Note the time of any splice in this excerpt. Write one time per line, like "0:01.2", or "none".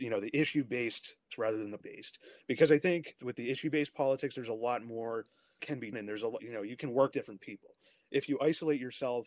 0:01.3
0:01.8
0:03.2
0:05.6
0:05.9
0:06.4
0:07.1